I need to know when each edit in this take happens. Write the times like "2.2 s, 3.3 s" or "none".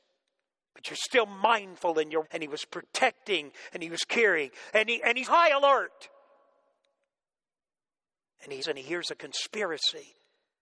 2.2 s, 5.2 s, 8.6 s